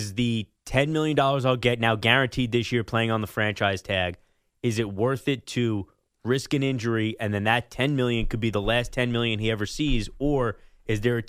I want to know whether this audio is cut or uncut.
uncut